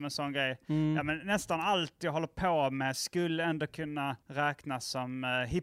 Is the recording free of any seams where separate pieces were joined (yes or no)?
no